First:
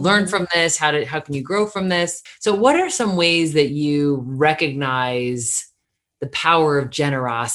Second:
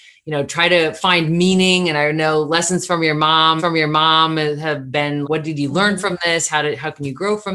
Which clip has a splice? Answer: second; 2 cuts; at 3.6 s, 5.2 s

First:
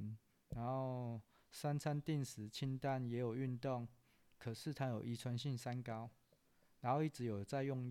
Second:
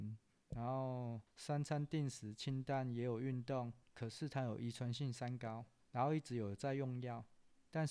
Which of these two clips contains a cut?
second; 3 cuts; at 1.3 s, 3.8 s, 5.8 s

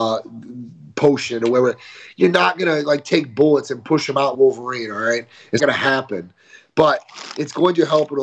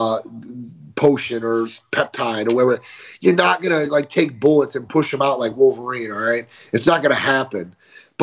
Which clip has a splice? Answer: first; 3 cuts; at 1.4 s, 4.3 s, 5.6 s

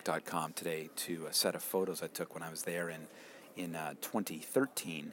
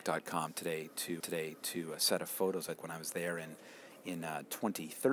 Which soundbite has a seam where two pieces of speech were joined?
second; 2 cuts; at 1.2 s, 2.8 s

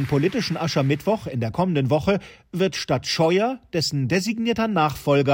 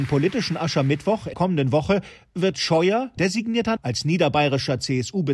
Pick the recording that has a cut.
second; 4 cuts; at 1.3 s, 2.5 s, 3.2 s, 3.8 s

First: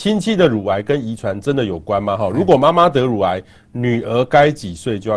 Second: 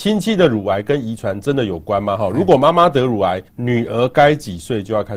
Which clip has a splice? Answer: second; 1 cut; at 3.5 s

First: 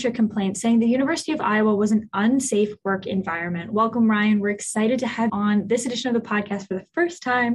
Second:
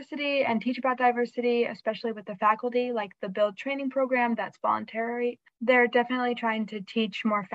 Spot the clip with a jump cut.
first; 1 cut; at 5.3 s

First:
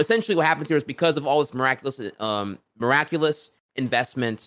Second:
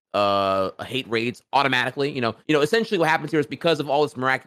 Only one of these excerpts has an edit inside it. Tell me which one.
second; 1 cut; at 2.4 s

